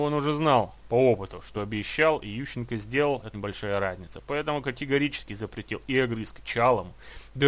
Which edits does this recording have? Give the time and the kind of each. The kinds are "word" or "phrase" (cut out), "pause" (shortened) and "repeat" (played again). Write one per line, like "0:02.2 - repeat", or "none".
0:01.5 - word
0:03.3 - word
0:06.4 - word